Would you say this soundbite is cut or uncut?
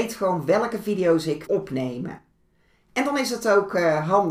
cut